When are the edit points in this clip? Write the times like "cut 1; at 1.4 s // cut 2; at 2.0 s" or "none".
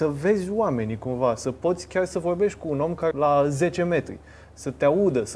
cut 1; at 3.1 s